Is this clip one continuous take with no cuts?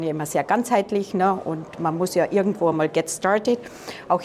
yes; 0 cuts

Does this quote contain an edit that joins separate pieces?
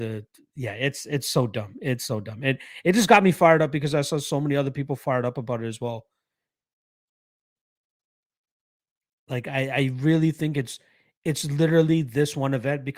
no; 0 cuts

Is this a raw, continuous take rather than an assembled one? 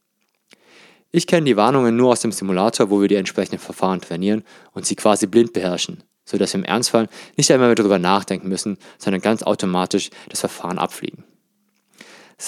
yes; 0 cuts

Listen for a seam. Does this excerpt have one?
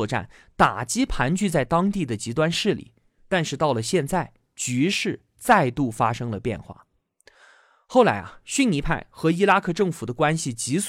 no; 0 cuts

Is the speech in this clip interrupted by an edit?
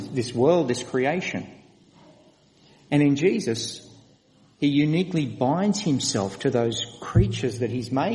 no; 0 cuts

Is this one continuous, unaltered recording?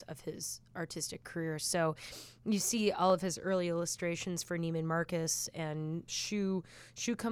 no; 1 cut; at 6.1 s

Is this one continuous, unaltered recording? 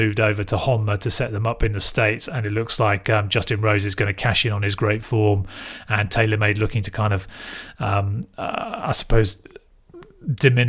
yes; 0 cuts

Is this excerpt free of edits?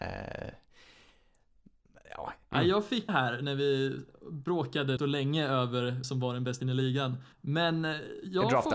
no; 5 cuts; at 3.1 s, 5.0 s, 6.0 s, 6.6 s, 7.3 s

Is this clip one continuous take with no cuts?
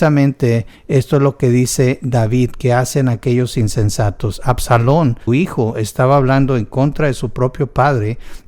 no; 1 cut; at 5.3 s

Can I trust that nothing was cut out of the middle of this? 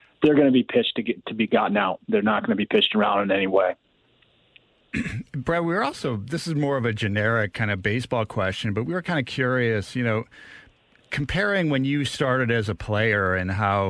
yes; 0 cuts

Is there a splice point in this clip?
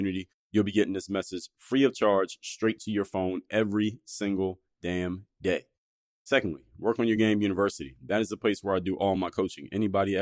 no; 0 cuts

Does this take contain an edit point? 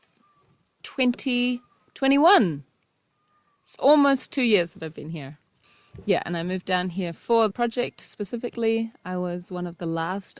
yes; 2 cuts; at 3.8 s, 7.5 s

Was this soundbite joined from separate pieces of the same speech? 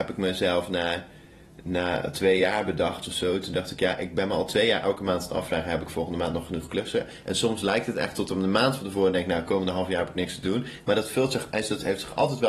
no; 0 cuts

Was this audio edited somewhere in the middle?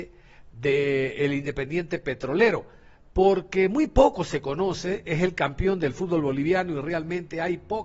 no; 0 cuts

